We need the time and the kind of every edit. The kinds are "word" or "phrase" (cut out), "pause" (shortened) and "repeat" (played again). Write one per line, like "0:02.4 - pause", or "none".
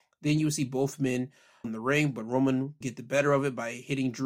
0:01.6 - word
0:02.8 - word